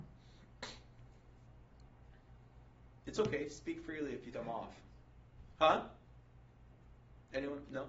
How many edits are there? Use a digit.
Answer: 1